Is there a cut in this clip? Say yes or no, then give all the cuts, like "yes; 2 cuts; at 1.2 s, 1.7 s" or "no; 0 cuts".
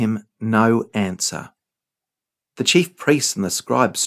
no; 0 cuts